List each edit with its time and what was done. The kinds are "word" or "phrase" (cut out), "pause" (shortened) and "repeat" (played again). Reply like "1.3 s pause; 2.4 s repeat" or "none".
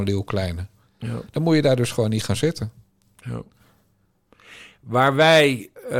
none